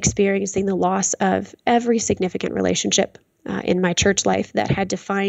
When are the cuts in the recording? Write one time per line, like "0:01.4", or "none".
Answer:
none